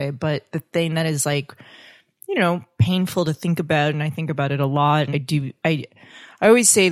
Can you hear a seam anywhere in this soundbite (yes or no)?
yes